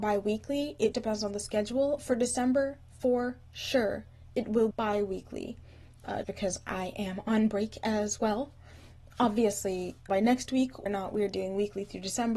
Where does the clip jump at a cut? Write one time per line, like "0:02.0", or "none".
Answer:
0:00.9
0:04.7
0:06.2
0:10.1
0:10.9